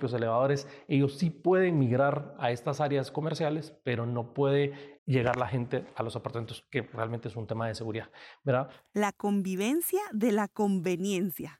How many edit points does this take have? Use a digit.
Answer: 1